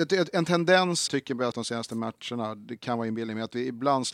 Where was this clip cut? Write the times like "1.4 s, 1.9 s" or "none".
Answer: 1.1 s, 1.5 s